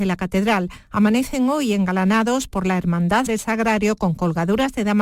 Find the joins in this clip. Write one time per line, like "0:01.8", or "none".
0:03.3

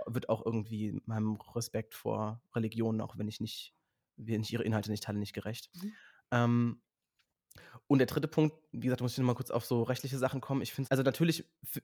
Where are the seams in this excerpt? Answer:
0:05.7
0:10.9

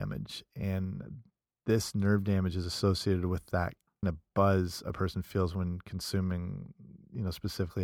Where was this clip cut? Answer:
0:04.0

